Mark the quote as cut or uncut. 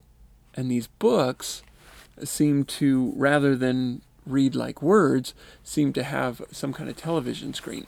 uncut